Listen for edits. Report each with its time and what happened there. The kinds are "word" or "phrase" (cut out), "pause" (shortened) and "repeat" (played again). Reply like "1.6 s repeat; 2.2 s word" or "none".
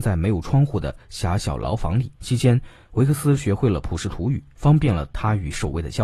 2.2 s pause